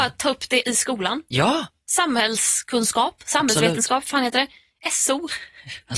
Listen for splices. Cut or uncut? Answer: uncut